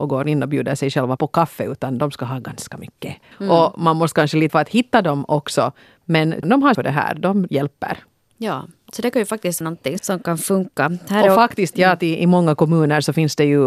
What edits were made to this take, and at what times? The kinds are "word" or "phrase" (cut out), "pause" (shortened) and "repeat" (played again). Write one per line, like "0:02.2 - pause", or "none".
0:01.2 - word
0:03.3 - word
0:04.5 - word
0:06.4 - word
0:06.7 - word
0:07.5 - word
0:09.6 - word
0:10.0 - word
0:11.7 - word